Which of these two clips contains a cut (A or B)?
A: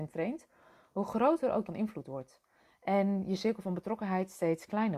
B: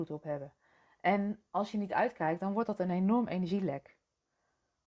A